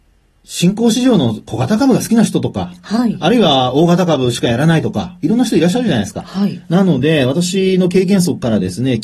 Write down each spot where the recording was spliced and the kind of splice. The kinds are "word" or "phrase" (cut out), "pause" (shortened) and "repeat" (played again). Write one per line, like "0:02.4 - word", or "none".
none